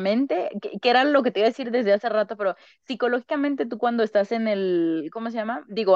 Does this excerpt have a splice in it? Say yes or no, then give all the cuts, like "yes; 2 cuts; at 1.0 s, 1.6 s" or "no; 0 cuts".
no; 0 cuts